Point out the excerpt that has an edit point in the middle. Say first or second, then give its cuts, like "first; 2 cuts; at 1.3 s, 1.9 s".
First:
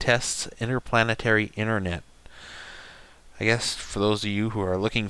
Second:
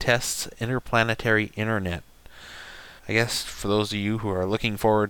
second; 1 cut; at 3.0 s